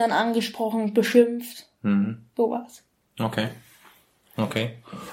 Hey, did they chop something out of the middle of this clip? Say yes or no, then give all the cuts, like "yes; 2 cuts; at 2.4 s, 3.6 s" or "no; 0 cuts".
no; 0 cuts